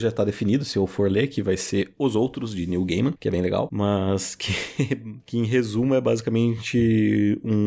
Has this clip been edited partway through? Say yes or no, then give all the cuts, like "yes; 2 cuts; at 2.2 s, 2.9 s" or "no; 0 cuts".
no; 0 cuts